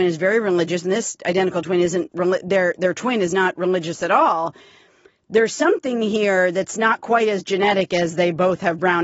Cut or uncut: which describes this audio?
uncut